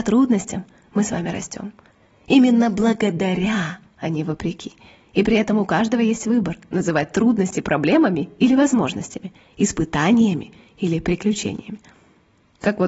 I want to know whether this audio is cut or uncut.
uncut